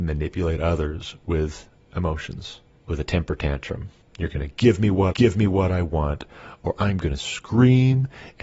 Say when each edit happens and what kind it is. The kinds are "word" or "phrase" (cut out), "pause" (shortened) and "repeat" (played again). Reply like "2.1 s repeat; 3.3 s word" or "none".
5.1 s repeat